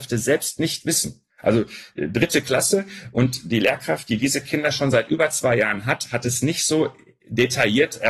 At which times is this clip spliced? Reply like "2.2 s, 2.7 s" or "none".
1.3 s